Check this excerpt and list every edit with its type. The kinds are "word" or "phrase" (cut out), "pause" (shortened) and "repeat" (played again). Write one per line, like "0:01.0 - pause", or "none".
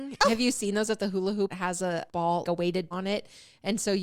0:01.0 - word
0:01.5 - word
0:02.1 - word
0:02.4 - word
0:02.9 - word